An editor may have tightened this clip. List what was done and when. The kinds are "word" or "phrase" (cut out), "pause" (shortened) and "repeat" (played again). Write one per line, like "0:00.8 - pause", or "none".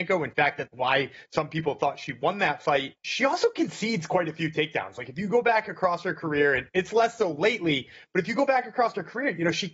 0:03.0 - pause